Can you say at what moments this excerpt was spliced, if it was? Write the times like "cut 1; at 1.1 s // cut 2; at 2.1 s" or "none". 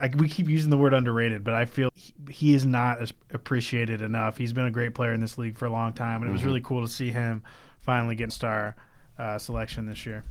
cut 1; at 1.9 s // cut 2; at 8.3 s